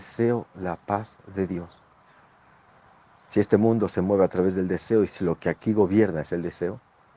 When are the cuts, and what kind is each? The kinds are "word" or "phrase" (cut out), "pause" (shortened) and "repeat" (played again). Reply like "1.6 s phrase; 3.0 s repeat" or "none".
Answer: none